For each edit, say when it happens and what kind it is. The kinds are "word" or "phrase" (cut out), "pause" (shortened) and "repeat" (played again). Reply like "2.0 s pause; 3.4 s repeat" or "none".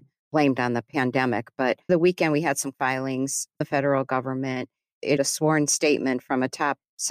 1.9 s word; 2.7 s word; 3.6 s word; 5.2 s word